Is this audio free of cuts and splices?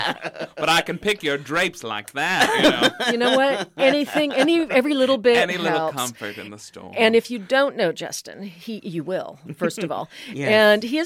yes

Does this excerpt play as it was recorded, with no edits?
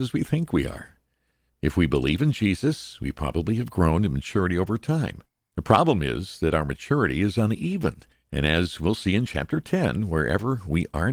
yes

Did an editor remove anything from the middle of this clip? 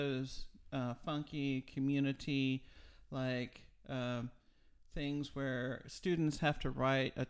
no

